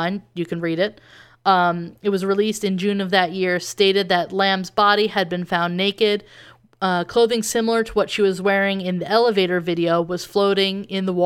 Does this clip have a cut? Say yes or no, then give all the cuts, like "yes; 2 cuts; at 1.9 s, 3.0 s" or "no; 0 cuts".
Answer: no; 0 cuts